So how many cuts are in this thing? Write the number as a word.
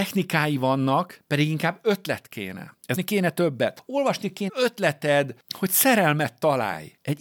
two